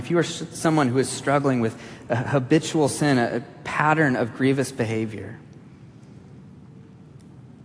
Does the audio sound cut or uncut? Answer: uncut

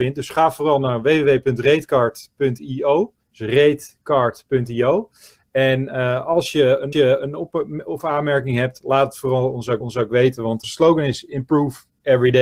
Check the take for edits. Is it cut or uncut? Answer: cut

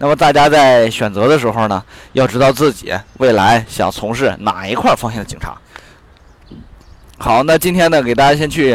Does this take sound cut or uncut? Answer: uncut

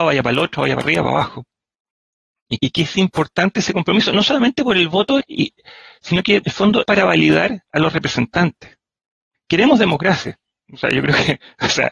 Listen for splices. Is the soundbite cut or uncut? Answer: cut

